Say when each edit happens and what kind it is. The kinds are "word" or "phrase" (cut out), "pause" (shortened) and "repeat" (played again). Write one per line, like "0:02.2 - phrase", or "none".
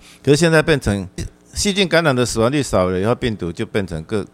0:01.2 - word